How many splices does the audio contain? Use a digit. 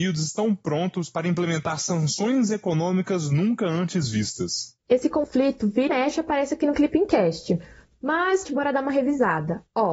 2